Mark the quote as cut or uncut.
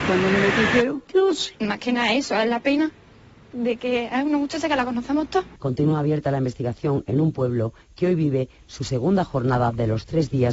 uncut